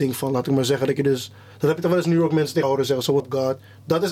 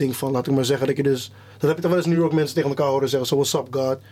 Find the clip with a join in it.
first; 2 cuts; at 2.6 s, 3.2 s

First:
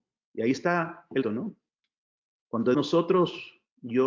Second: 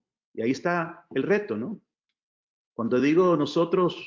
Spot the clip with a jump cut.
first; 2 cuts; at 1.2 s, 2.7 s

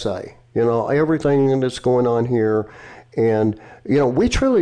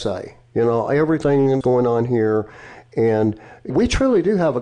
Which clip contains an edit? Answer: second; 2 cuts; at 1.6 s, 3.7 s

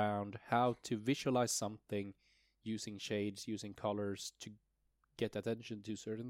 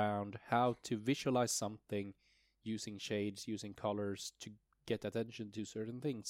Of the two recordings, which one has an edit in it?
second; 1 cut; at 4.6 s

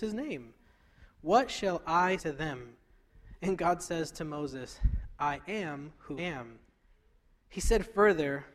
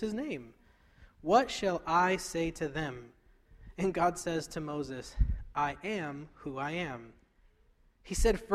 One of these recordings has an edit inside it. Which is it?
first; 2 cuts; at 2.2 s, 6.2 s

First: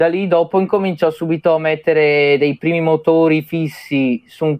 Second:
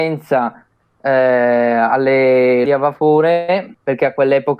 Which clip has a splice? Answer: second; 1 cut; at 2.6 s

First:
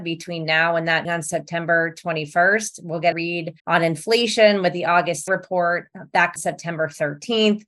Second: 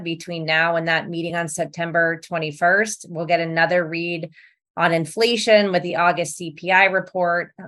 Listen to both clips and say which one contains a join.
first; 5 cuts; at 1.0 s, 3.1 s, 3.6 s, 5.3 s, 6.4 s

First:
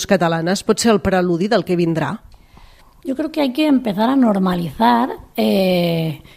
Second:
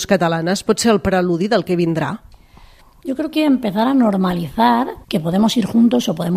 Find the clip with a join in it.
second; 2 cuts; at 3.3 s, 5.0 s

